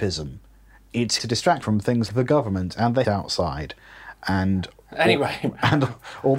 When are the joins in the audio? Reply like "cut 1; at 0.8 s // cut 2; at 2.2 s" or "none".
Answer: cut 1; at 1.2 s // cut 2; at 1.6 s // cut 3; at 2.1 s // cut 4; at 3.0 s